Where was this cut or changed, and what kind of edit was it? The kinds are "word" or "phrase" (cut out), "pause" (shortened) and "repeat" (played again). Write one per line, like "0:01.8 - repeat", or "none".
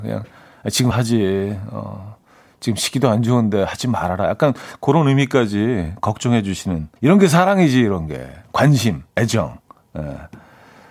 0:00.9 - phrase
0:07.0 - pause
0:09.1 - pause